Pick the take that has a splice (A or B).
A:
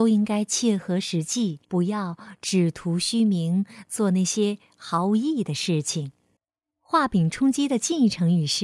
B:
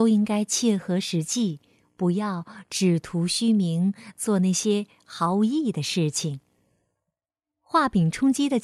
A